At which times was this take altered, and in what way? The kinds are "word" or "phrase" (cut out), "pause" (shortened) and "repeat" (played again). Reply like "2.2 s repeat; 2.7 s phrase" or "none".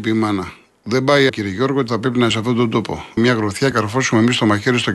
1.3 s word; 1.9 s word; 2.3 s word; 3.2 s word; 3.7 s word